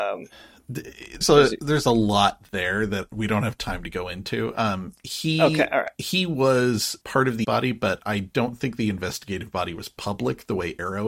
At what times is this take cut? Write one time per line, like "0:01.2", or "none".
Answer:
0:01.2
0:07.0
0:07.4

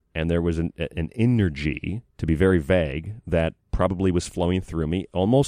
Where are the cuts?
0:02.1
0:03.6

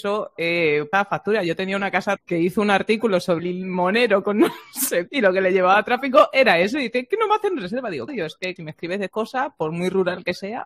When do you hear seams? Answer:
0:00.9
0:02.2
0:03.4
0:05.1
0:08.1
0:08.6
0:09.1

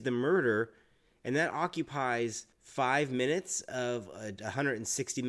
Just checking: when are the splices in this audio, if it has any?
0:02.5

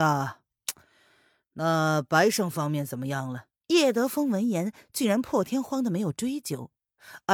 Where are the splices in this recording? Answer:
0:03.6

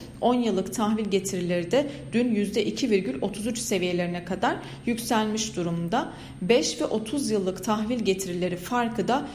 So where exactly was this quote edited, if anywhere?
none

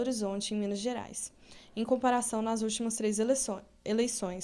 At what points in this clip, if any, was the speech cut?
none

